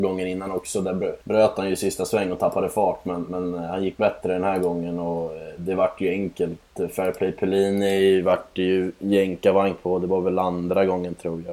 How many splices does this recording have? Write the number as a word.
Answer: one